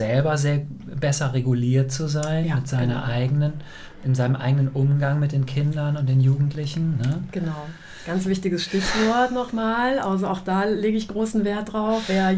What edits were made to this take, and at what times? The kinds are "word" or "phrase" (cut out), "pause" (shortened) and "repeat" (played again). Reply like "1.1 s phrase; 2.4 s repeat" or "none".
none